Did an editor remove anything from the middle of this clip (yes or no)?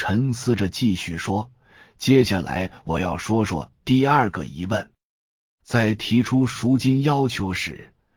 no